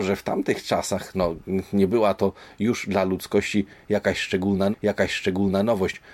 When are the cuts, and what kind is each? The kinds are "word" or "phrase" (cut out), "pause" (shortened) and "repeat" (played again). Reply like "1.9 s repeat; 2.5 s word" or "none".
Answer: 1.1 s word; 4.7 s repeat